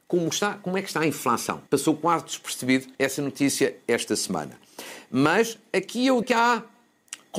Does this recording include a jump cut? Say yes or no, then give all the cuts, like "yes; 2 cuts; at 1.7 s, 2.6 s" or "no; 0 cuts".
yes; 3 cuts; at 1.7 s, 2.9 s, 6.2 s